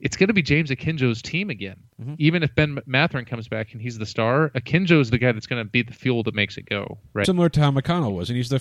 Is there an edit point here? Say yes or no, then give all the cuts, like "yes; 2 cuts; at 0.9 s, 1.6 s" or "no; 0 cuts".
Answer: yes; 1 cut; at 7.2 s